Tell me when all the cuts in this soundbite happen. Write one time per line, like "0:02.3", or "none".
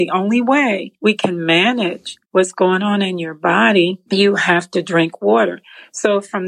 0:02.2